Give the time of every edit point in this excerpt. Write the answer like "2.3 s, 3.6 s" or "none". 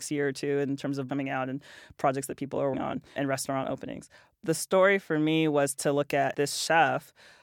1.1 s, 2.7 s, 3.2 s, 4.3 s, 6.3 s